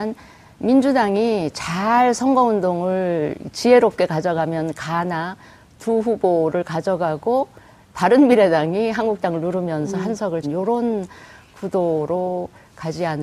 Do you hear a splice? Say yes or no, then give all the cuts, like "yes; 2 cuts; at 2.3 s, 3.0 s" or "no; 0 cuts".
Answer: yes; 1 cut; at 10.4 s